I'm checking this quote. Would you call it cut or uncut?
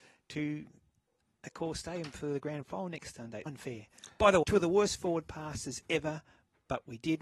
cut